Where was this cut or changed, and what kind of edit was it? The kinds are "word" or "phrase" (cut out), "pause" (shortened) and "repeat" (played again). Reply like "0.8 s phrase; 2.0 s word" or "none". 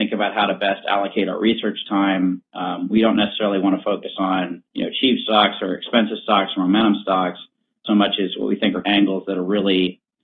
4.6 s pause; 7.8 s word; 8.8 s phrase